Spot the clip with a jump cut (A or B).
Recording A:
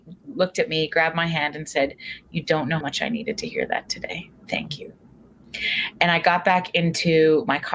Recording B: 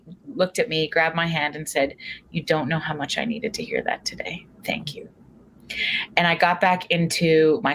A